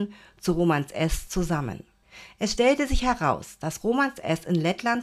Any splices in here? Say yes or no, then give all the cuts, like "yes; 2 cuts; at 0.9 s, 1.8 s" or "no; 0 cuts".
no; 0 cuts